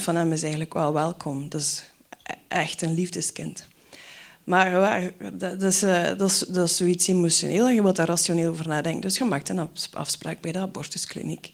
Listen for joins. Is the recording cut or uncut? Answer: uncut